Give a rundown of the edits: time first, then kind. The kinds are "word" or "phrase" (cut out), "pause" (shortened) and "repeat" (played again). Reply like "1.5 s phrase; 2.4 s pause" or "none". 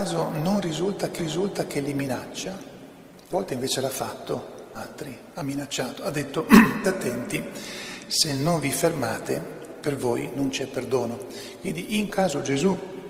1.2 s repeat; 3.3 s word; 4.7 s word; 6.8 s word; 12.1 s word